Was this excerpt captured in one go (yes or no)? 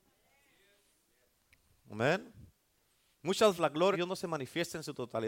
no